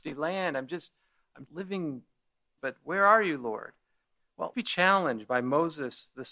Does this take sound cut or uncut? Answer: cut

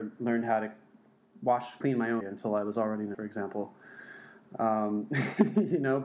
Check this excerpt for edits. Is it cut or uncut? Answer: cut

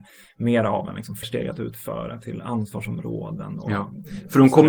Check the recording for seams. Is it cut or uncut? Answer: cut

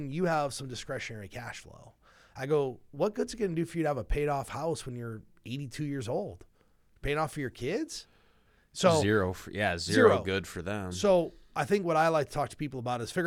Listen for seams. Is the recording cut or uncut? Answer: uncut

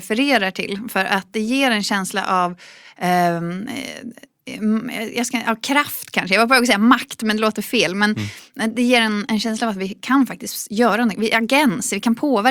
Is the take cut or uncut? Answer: uncut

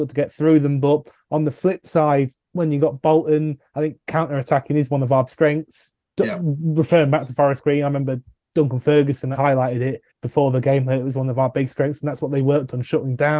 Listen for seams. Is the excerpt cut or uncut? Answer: cut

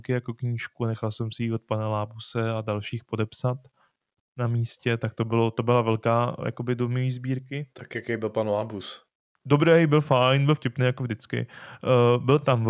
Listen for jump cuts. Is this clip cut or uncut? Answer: uncut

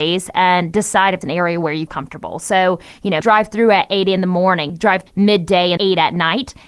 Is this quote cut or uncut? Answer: cut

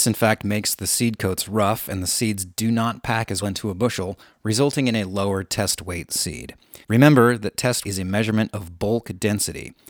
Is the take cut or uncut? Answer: cut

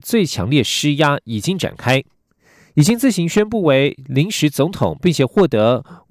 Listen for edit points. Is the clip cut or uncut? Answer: uncut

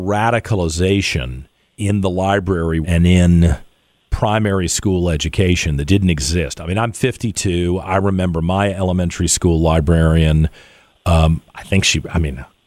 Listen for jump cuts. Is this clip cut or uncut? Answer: cut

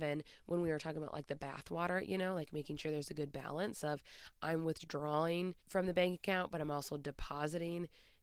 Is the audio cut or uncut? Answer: cut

